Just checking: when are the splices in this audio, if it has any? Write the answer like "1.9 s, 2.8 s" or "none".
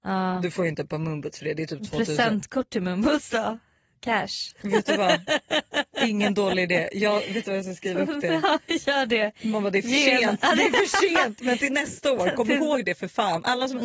none